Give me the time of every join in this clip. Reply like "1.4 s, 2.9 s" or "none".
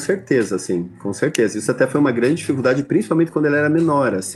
none